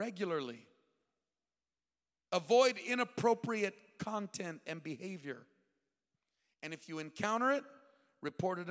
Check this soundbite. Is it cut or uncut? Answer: uncut